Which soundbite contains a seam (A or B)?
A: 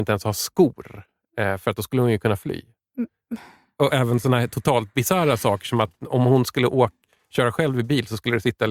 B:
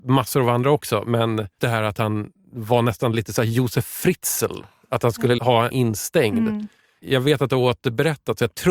B